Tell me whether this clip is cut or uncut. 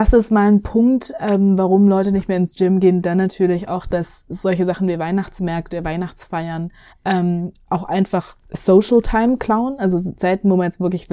cut